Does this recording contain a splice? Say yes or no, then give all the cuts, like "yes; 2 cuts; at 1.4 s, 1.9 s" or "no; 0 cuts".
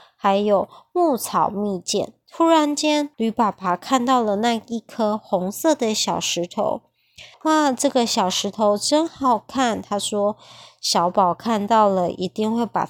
yes; 2 cuts; at 3.1 s, 7.3 s